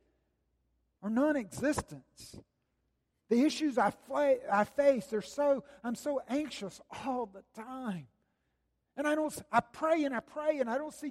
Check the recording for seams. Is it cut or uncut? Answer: uncut